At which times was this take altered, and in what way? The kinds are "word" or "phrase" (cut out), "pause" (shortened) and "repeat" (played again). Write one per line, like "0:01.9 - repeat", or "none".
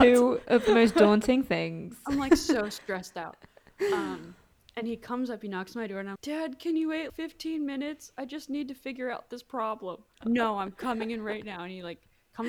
0:06.2 - word
0:07.1 - word
0:10.2 - word